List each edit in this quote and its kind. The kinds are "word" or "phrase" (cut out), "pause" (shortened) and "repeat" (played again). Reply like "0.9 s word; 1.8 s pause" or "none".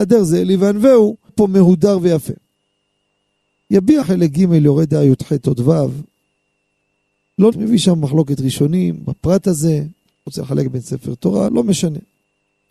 1.3 s word; 4.0 s word; 7.5 s word; 11.5 s word